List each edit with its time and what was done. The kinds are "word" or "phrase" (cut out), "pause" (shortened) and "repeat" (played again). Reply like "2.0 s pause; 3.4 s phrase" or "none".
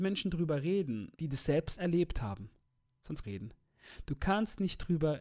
1.2 s pause; 3.2 s phrase